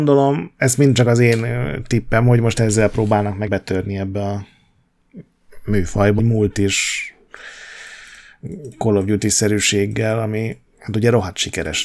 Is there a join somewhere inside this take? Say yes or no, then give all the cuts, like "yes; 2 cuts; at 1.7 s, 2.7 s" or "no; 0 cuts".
yes; 2 cuts; at 3.5 s, 6.2 s